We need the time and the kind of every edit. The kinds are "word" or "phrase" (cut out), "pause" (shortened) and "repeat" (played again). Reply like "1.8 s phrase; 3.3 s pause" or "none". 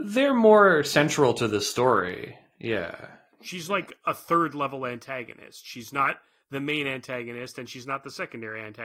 none